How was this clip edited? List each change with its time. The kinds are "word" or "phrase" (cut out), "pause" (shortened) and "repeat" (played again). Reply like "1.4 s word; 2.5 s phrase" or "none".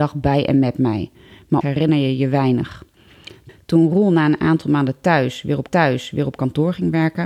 1.6 s phrase; 5.7 s repeat